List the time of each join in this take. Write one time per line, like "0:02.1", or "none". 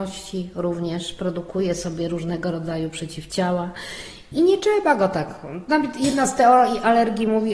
none